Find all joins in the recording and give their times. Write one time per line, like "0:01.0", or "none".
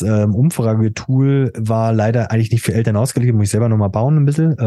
none

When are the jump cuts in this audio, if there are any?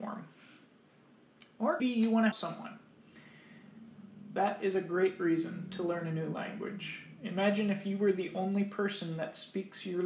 0:01.8
0:02.3

